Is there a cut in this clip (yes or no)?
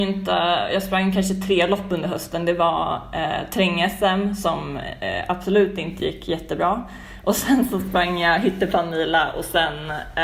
no